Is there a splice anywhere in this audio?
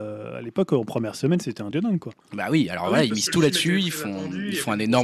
yes; 2 cuts; at 1.7 s, 2.2 s

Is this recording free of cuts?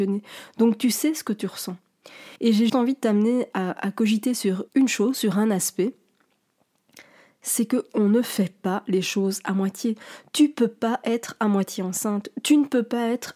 no; 3 cuts; at 2.4 s, 2.7 s, 4.7 s

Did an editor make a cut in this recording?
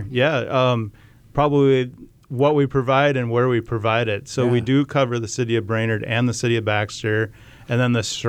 no; 0 cuts

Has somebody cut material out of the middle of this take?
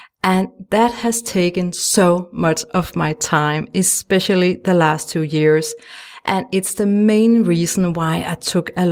no; 0 cuts

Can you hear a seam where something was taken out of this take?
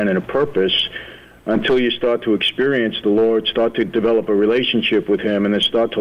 no; 0 cuts

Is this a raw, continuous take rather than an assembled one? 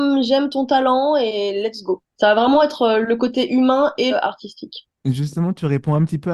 no; 3 cuts; at 2.1 s, 4.1 s, 5.0 s

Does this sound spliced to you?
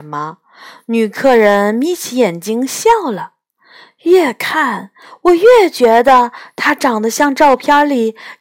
no; 0 cuts

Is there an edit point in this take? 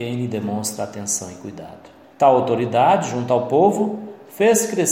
yes; 1 cut; at 2.0 s

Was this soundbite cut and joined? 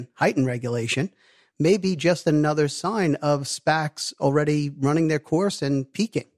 no; 0 cuts

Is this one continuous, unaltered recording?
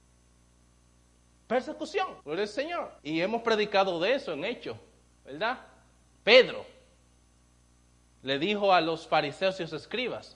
no; 2 cuts; at 2.2 s, 3.0 s

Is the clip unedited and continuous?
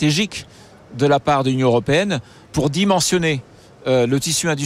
yes; 0 cuts

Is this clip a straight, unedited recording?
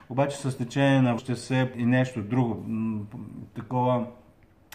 no; 2 cuts; at 1.2 s, 1.7 s

